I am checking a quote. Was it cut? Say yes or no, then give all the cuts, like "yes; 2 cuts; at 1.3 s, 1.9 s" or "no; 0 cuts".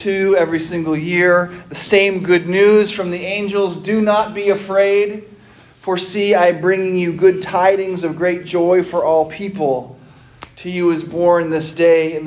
no; 0 cuts